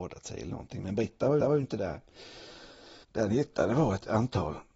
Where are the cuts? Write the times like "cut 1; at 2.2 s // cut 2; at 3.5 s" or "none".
cut 1; at 1.4 s // cut 2; at 3.0 s